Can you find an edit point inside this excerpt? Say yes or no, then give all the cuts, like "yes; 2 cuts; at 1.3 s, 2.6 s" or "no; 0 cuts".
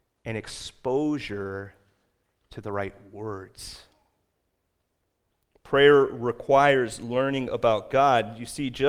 no; 0 cuts